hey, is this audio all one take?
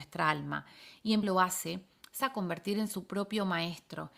no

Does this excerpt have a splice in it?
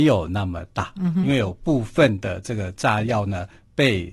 yes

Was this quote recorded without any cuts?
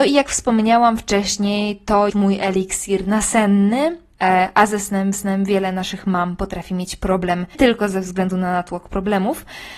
no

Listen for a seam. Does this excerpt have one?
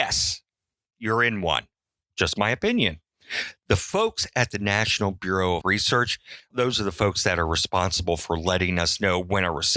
yes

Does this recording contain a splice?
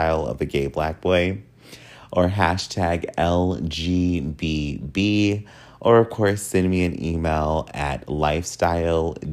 no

